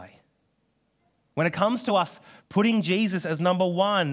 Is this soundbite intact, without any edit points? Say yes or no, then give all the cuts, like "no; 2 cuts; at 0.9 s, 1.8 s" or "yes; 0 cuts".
yes; 0 cuts